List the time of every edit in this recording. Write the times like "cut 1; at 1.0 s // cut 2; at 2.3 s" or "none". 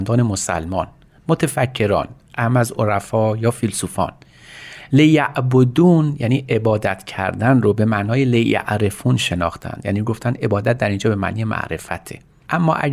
none